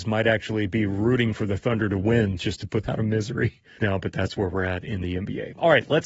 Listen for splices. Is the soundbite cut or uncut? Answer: cut